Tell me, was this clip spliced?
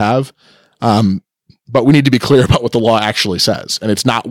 no; 0 cuts

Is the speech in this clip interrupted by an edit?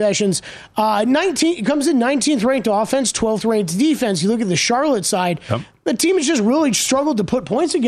no; 0 cuts

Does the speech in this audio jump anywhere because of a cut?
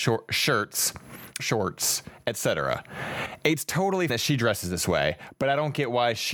yes; 2 cuts; at 1.4 s, 4.1 s

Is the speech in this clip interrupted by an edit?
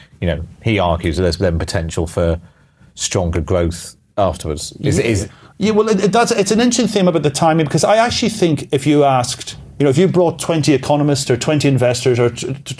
no; 0 cuts

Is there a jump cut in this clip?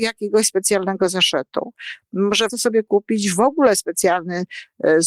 yes; 1 cut; at 2.5 s

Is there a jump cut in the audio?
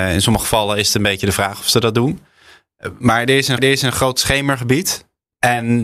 yes; 1 cut; at 3.6 s

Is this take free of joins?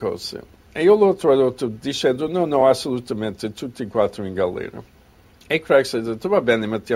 yes; 0 cuts

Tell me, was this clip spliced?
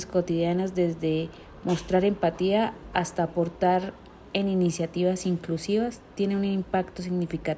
no; 0 cuts

